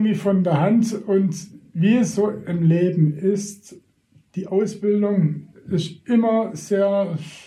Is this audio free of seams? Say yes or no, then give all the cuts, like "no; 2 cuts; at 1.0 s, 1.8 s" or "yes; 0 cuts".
yes; 0 cuts